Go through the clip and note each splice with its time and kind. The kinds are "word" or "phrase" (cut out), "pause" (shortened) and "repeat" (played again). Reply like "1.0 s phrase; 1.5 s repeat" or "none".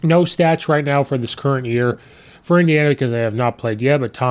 none